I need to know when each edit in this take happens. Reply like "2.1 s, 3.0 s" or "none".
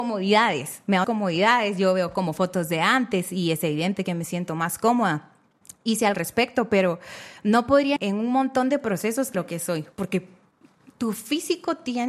1.0 s, 6.1 s, 8.0 s, 9.3 s, 9.9 s